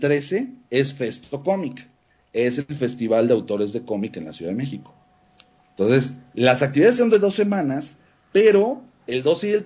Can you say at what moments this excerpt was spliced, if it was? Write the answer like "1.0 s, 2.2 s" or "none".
none